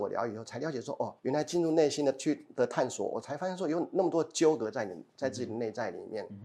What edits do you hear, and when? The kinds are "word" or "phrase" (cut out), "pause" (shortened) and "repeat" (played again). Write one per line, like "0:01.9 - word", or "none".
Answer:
0:01.2 - pause